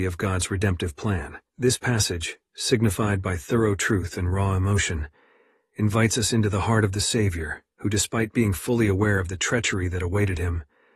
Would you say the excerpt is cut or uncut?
cut